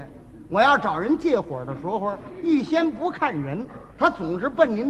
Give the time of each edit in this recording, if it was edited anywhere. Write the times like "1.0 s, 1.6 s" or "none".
3.9 s